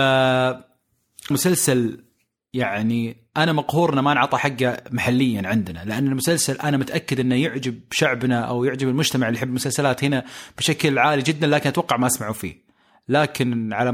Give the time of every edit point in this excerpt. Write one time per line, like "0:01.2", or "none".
0:01.3